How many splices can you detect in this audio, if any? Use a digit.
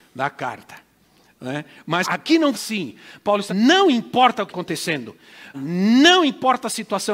5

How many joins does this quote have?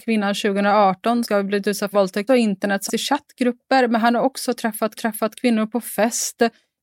5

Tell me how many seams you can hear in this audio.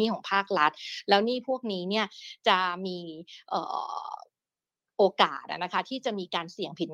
0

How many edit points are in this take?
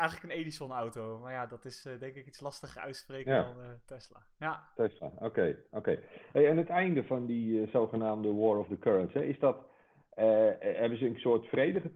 0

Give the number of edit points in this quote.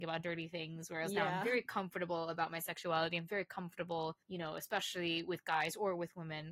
1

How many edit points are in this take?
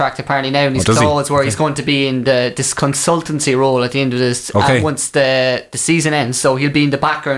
0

